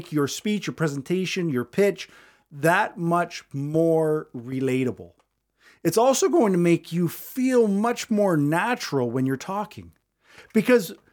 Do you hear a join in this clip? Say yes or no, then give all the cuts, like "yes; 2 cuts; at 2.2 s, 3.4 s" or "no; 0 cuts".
no; 0 cuts